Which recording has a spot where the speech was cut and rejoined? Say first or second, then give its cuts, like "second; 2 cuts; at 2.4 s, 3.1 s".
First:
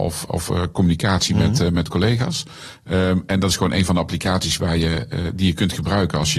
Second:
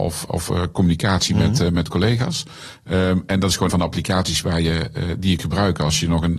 second; 2 cuts; at 3.7 s, 5.4 s